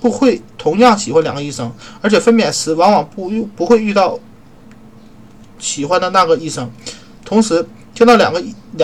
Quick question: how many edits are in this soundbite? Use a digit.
0